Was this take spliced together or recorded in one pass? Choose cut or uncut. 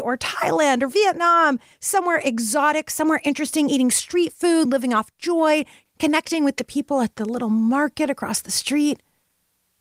uncut